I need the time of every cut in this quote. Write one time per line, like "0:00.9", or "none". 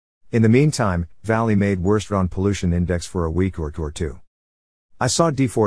0:01.2
0:02.1
0:03.7